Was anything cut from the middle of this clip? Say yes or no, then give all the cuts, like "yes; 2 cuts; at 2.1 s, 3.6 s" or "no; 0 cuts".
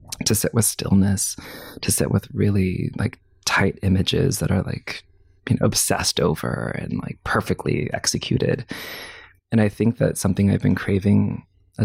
no; 0 cuts